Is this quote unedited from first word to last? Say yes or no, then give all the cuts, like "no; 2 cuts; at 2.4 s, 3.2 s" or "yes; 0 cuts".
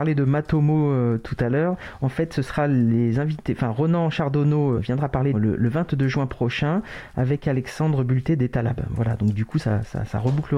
no; 2 cuts; at 4.7 s, 5.3 s